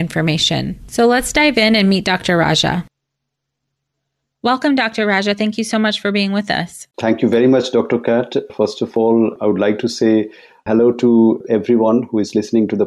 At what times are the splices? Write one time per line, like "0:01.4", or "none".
0:06.9